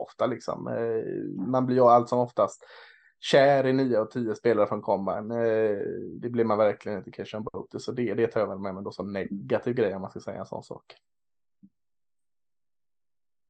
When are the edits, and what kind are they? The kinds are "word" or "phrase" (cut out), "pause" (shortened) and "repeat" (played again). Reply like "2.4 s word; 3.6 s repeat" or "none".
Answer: none